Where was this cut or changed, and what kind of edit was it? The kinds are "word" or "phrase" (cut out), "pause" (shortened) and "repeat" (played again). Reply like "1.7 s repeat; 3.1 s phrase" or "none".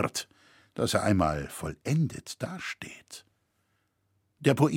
none